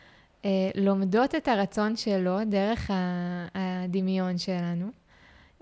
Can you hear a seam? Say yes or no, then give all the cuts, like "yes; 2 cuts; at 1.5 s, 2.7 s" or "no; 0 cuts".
no; 0 cuts